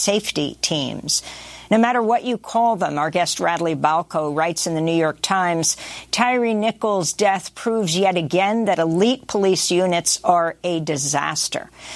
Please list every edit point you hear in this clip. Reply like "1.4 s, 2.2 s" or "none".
none